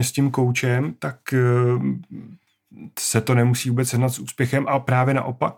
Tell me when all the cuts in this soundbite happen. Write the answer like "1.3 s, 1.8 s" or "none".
none